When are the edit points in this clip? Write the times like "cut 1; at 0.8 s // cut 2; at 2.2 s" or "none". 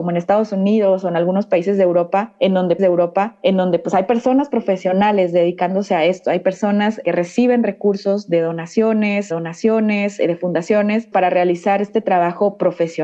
cut 1; at 2.8 s // cut 2; at 7.0 s // cut 3; at 9.3 s // cut 4; at 11.1 s